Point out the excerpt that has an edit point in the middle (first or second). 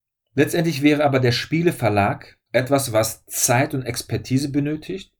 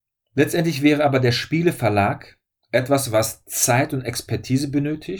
first